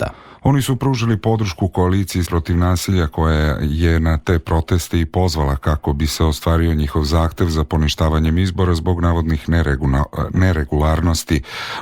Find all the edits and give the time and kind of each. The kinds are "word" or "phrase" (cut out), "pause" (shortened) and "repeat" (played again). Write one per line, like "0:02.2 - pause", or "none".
0:02.2 - word